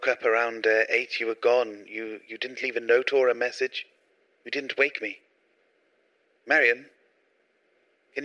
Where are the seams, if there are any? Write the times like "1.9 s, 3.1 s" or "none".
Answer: none